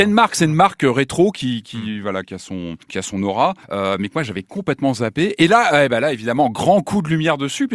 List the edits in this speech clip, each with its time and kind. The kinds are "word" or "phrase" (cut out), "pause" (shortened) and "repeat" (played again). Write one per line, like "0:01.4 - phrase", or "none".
0:01.6 - word
0:02.8 - pause
0:03.6 - pause